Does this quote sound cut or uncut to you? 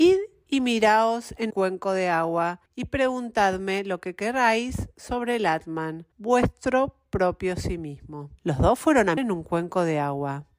cut